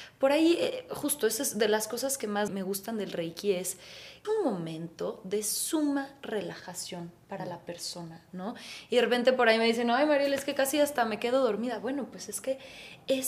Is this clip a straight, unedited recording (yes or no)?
no